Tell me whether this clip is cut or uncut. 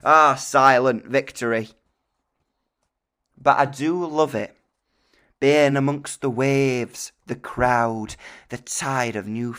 uncut